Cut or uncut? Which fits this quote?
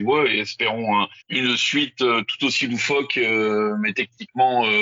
cut